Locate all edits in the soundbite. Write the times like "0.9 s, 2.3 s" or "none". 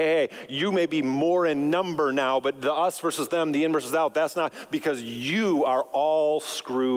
none